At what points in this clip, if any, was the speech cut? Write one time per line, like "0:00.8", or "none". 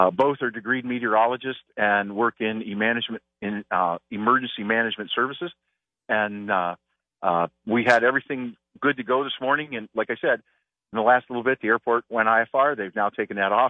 none